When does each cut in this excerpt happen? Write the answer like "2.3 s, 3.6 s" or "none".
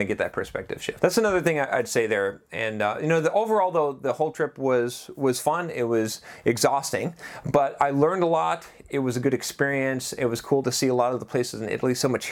1.0 s